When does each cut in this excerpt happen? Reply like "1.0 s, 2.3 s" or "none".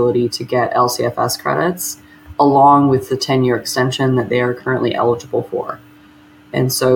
none

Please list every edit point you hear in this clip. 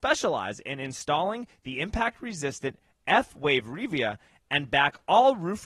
none

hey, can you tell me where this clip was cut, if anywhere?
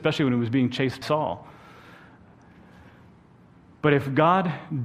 1.0 s

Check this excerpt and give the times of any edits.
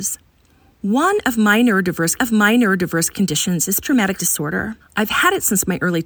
2.2 s, 3.8 s, 4.2 s, 4.8 s

